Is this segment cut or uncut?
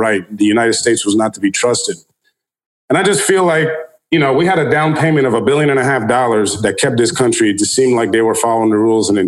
uncut